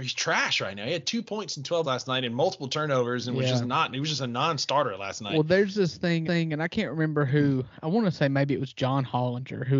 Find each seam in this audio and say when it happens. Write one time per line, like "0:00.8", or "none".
0:01.8
0:06.2